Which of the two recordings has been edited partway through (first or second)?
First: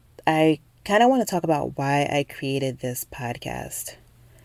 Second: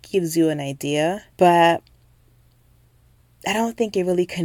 second